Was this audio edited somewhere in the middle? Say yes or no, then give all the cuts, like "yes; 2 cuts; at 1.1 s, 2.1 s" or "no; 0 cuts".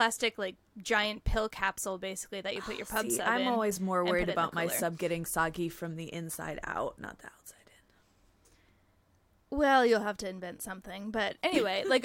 no; 0 cuts